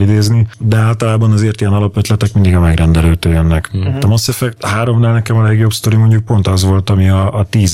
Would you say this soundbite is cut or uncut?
uncut